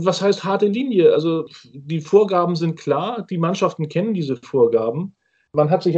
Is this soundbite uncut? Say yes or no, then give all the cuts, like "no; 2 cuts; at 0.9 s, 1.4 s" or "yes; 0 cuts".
yes; 0 cuts